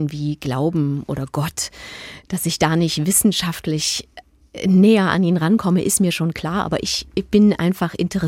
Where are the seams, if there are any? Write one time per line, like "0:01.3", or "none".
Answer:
none

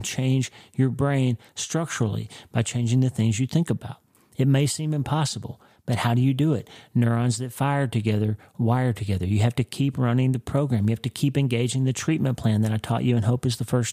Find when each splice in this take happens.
none

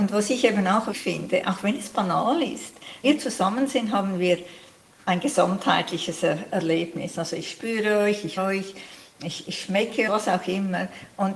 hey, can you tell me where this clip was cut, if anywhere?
0:00.9
0:03.0
0:08.4
0:10.1

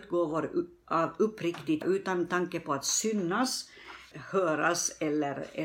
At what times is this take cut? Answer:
0:01.8
0:04.1

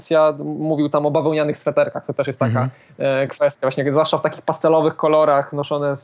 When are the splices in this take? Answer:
none

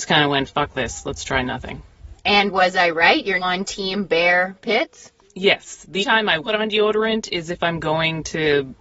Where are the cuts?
0:03.4
0:06.0
0:06.4

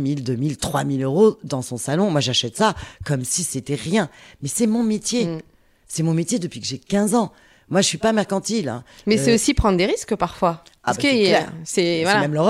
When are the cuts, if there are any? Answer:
none

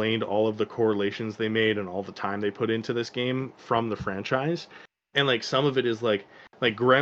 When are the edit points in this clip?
none

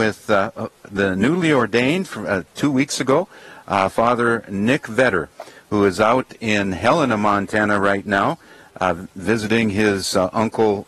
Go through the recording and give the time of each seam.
none

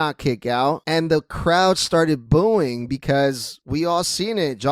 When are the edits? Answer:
none

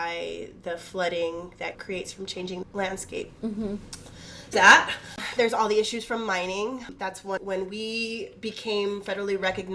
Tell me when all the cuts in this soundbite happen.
0:01.7
0:02.6
0:04.5
0:07.4

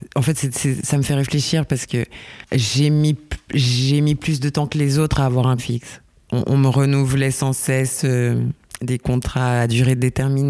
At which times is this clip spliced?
0:02.5
0:05.6

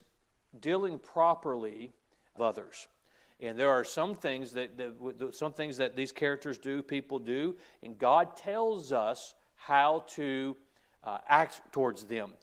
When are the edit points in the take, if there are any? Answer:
0:02.4

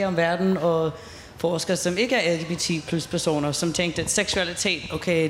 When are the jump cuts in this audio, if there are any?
none

